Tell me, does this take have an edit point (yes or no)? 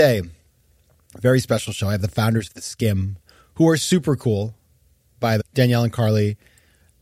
yes